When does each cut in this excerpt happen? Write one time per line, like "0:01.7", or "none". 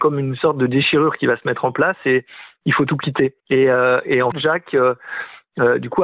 0:03.4
0:04.3